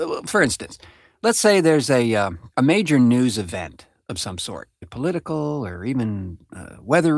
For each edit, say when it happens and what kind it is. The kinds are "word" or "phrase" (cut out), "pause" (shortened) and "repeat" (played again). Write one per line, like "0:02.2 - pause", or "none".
0:02.5 - pause
0:04.8 - phrase